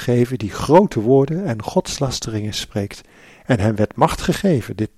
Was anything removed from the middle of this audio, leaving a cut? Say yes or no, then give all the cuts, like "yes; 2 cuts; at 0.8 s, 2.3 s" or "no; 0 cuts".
no; 0 cuts